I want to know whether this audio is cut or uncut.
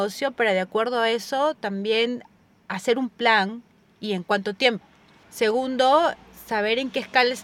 uncut